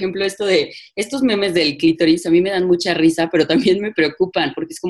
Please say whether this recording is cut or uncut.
uncut